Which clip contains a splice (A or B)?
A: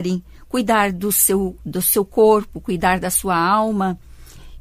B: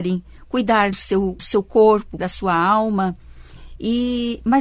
B